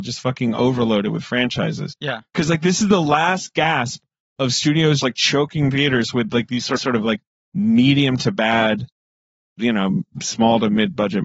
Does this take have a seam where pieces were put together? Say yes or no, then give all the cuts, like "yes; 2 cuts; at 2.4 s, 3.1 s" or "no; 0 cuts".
yes; 2 cuts; at 5.0 s, 6.8 s